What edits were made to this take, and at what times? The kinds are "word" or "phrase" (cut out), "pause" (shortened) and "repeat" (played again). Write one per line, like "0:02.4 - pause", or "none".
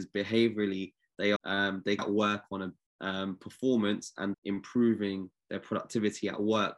0:01.4 - phrase
0:02.0 - phrase
0:02.8 - word
0:04.3 - word